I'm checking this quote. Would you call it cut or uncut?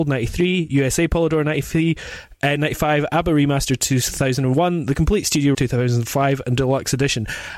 cut